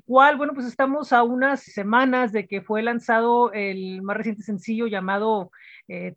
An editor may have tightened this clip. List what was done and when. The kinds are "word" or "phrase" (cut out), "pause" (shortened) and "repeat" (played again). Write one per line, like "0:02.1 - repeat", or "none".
0:01.7 - word